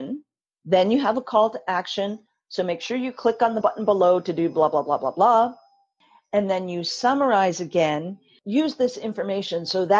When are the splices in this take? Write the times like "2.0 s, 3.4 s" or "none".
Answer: none